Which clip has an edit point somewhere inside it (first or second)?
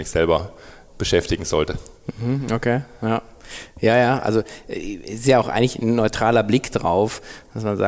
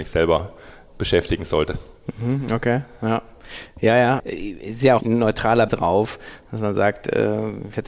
second